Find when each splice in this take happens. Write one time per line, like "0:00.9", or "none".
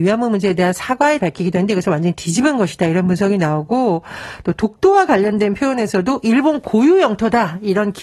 0:01.2